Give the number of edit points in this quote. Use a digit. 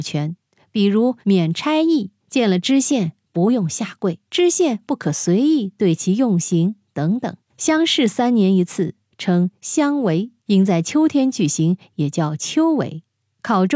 4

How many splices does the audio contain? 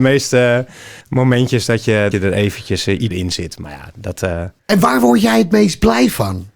4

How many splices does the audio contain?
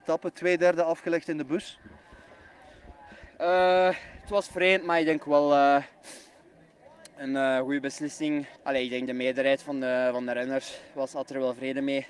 1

